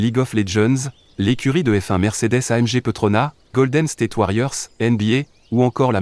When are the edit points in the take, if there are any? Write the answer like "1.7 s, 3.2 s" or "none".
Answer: 3.5 s